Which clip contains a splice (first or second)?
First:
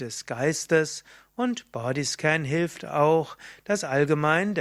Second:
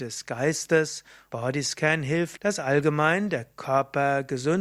second